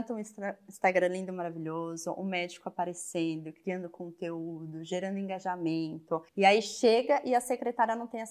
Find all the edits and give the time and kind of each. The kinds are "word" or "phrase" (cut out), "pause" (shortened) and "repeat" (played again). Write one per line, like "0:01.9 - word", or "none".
0:06.3 - pause